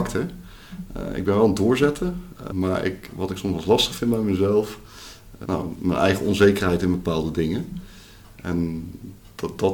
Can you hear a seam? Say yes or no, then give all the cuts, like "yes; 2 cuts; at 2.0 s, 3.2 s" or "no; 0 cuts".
yes; 2 cuts; at 2.5 s, 5.4 s